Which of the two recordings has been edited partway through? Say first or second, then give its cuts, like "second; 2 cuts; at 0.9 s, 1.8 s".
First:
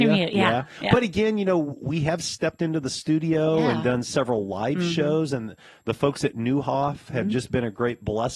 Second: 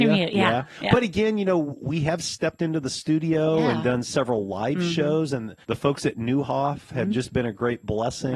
second; 1 cut; at 5.6 s